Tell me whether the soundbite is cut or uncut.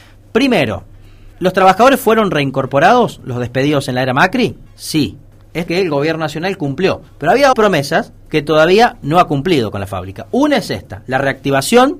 cut